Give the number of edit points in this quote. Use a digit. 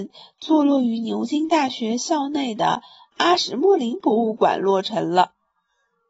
0